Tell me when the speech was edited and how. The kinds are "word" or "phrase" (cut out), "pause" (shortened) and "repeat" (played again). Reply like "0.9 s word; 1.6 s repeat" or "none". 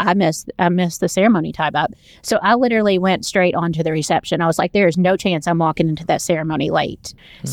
none